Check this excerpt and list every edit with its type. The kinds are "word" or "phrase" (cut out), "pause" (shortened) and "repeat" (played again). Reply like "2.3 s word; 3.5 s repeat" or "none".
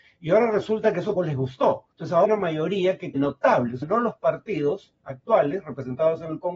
1.2 s word; 1.9 s pause; 2.2 s phrase; 3.1 s phrase; 3.8 s word